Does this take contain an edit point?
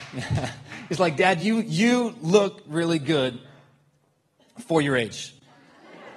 no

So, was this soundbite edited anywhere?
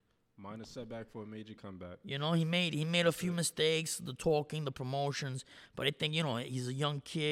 no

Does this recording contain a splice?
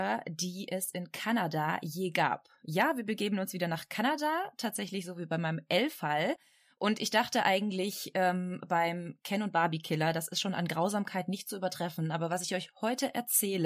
no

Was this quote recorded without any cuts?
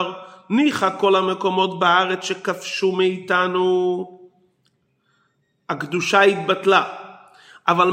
yes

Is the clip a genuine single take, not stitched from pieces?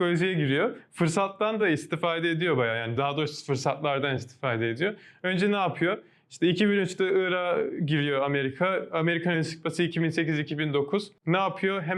yes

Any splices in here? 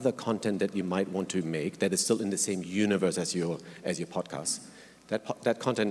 no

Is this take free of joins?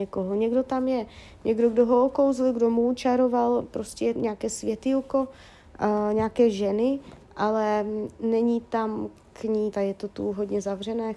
no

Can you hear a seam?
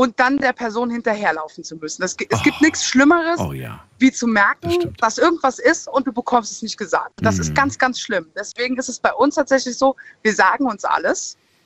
no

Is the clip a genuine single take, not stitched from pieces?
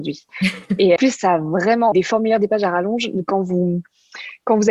no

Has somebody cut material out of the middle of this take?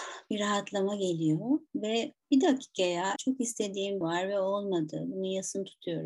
yes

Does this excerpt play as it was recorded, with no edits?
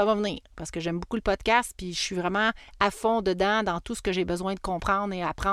yes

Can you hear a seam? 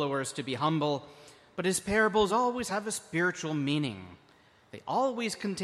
no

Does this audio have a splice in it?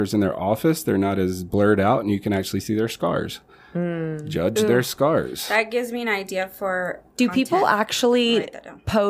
no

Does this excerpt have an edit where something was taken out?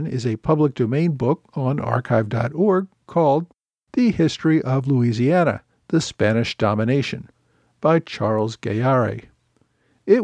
no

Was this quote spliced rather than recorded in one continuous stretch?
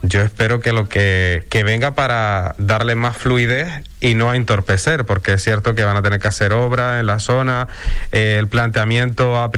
no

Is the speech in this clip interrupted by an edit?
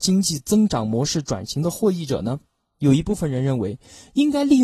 no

